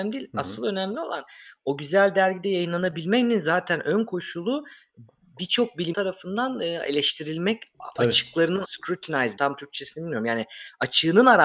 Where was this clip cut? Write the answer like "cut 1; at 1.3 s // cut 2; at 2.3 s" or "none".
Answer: cut 1; at 5.9 s // cut 2; at 8.6 s // cut 3; at 9.4 s